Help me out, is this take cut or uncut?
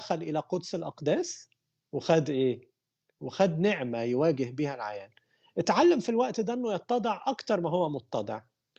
uncut